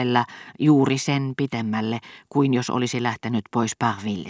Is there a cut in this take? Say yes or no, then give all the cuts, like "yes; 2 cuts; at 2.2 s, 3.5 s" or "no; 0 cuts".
no; 0 cuts